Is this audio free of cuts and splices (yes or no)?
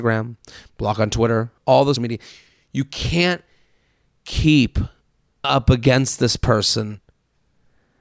no